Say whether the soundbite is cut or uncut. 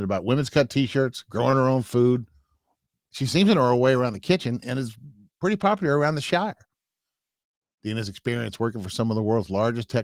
uncut